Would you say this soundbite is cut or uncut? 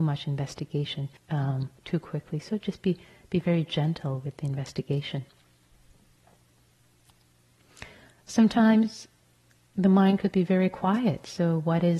cut